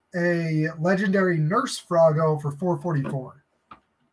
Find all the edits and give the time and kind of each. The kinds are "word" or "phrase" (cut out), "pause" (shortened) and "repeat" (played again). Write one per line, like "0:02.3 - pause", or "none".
none